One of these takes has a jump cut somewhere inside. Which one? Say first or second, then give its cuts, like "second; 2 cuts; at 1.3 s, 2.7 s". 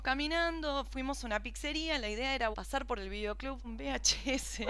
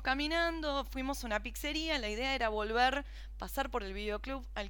first; 2 cuts; at 2.5 s, 3.6 s